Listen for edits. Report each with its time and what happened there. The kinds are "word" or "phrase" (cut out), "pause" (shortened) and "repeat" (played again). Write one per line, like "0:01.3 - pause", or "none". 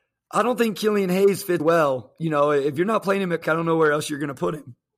0:01.6 - word
0:03.4 - word